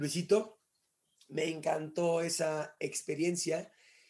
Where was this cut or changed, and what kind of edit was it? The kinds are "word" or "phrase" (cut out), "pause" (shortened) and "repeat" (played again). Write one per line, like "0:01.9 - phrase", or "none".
none

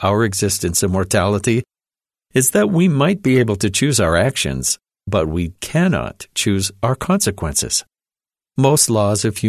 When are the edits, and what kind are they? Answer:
none

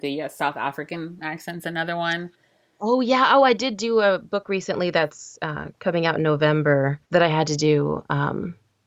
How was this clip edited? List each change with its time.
0:07.0 - pause

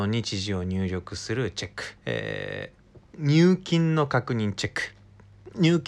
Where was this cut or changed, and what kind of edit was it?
0:02.0 - pause
0:03.1 - pause

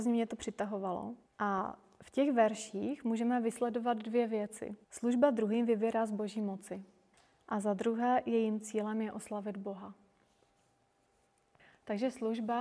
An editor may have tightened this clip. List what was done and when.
0:01.3 - pause
0:04.8 - pause
0:07.1 - pause

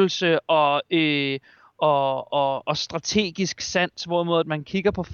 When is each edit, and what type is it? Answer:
none

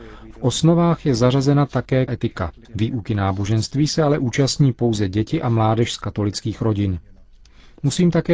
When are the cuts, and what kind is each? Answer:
0:02.1 - word
0:02.6 - pause

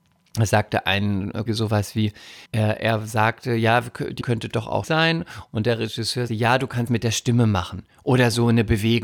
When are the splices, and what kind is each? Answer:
0:01.5 - word
0:02.5 - pause
0:04.2 - word
0:04.8 - word
0:06.3 - word
0:06.9 - phrase

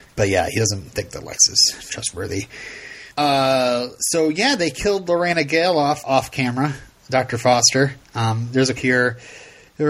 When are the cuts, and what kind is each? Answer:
0:03.1 - pause
0:06.0 - word
0:08.0 - pause
0:08.8 - word

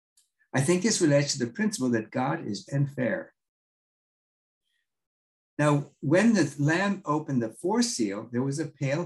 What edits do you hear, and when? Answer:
0:02.7 - word

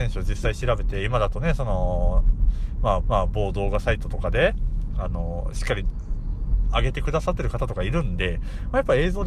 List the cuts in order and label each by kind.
0:03.0 - repeat

